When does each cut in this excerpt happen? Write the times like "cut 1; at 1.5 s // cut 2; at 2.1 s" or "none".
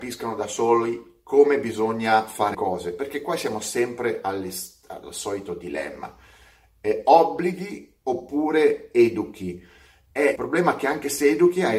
cut 1; at 2.5 s // cut 2; at 10.4 s